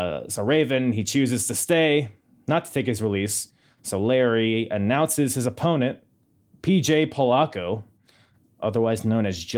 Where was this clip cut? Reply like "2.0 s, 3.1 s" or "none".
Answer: none